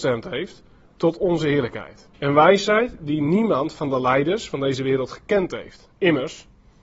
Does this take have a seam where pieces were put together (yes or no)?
yes